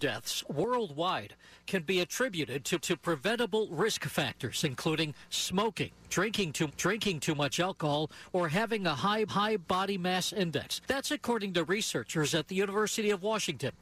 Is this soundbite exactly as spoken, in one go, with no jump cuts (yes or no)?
no